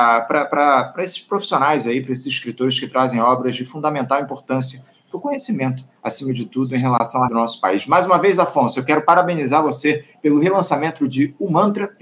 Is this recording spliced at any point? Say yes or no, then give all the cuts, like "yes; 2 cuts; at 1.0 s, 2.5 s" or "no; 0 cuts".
yes; 1 cut; at 7.3 s